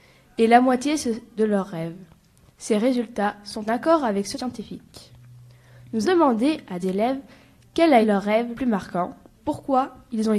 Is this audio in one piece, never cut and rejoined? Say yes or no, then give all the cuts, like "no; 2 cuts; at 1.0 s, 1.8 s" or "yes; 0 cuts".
no; 8 cuts; at 1.4 s, 3.7 s, 4.3 s, 6.0 s, 6.8 s, 8.0 s, 8.5 s, 9.4 s